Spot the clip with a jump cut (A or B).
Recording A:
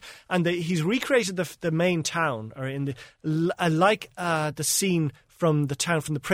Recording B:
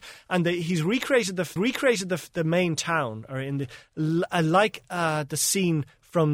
B